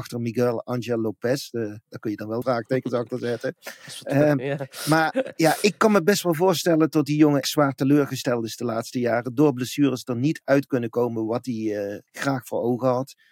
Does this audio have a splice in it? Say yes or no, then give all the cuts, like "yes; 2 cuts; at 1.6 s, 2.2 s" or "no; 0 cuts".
yes; 3 cuts; at 2.4 s, 7.4 s, 12.1 s